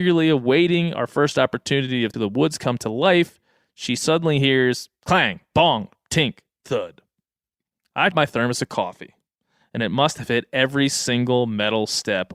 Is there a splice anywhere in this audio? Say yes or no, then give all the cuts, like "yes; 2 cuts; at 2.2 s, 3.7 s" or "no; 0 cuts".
yes; 3 cuts; at 2.1 s, 5.5 s, 8.1 s